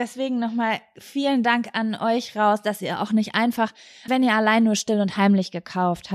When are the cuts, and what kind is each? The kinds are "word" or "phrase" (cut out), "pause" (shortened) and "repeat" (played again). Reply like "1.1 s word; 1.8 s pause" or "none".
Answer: 4.1 s word